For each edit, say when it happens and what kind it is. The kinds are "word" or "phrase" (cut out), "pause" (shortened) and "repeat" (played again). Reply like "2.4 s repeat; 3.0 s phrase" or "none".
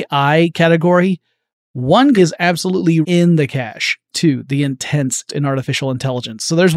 2.2 s word; 3.0 s word; 4.1 s word; 5.3 s word

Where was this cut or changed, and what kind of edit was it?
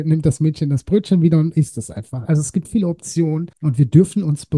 2.6 s word; 3.5 s pause

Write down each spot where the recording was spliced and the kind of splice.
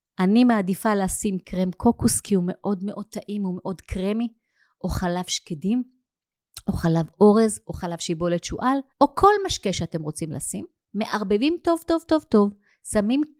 8.9 s pause

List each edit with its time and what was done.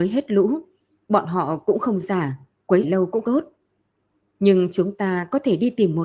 2.0 s word; 2.8 s word; 3.2 s word

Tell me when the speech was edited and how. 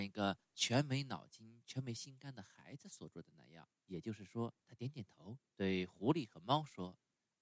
3.8 s pause; 4.6 s pause; 5.5 s pause

